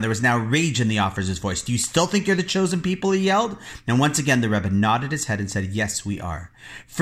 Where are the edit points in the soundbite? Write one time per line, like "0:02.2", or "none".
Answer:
none